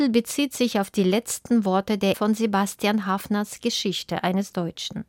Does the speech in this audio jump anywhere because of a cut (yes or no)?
yes